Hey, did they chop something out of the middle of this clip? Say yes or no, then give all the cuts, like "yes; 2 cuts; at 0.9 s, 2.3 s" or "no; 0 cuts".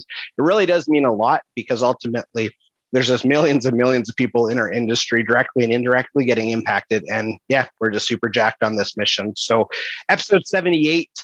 no; 0 cuts